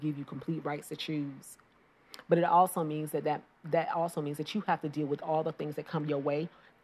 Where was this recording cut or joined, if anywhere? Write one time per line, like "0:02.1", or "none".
none